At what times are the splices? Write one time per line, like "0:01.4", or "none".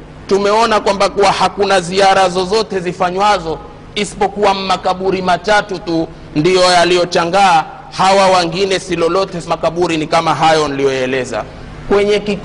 0:09.5